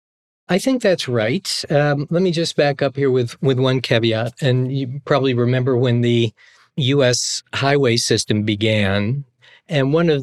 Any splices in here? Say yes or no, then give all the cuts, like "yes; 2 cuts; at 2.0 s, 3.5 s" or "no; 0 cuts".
no; 0 cuts